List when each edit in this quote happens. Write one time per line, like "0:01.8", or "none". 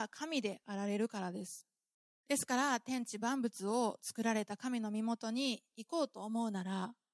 0:01.9